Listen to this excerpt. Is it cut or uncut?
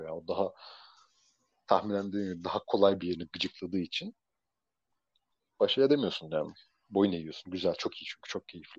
uncut